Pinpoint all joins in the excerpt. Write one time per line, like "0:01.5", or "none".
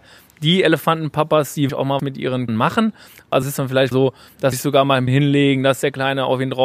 0:01.7
0:02.0
0:02.5
0:03.4
0:03.9
0:04.5
0:05.1